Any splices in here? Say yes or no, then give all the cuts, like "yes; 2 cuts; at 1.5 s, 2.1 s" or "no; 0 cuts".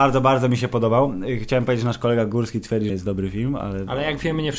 yes; 1 cut; at 2.9 s